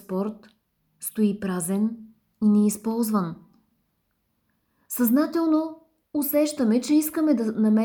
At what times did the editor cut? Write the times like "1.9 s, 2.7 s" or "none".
none